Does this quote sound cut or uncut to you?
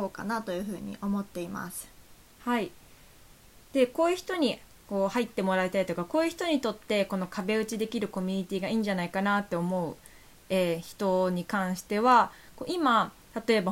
uncut